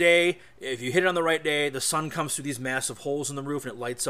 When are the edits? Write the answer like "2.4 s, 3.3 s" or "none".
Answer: none